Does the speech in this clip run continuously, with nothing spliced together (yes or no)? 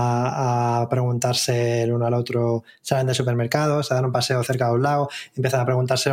yes